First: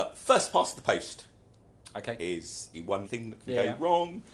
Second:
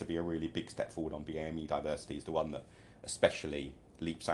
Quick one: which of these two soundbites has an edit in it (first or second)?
first